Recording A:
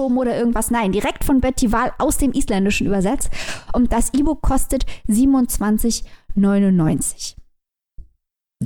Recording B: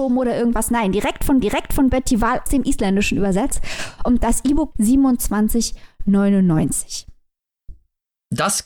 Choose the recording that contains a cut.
B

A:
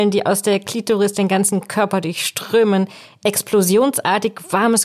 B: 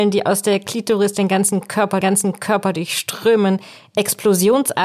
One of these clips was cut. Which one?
B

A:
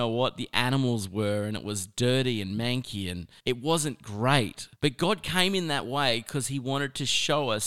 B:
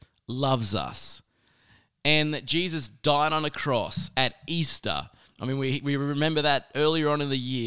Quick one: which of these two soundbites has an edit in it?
A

